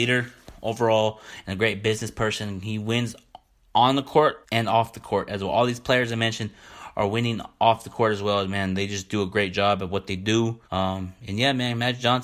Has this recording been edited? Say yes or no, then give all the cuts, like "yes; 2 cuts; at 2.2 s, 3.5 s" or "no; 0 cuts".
yes; 2 cuts; at 4.4 s, 10.6 s